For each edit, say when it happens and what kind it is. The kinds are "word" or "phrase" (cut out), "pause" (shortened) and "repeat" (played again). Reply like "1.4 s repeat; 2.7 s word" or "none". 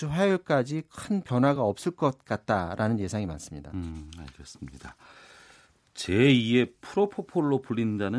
none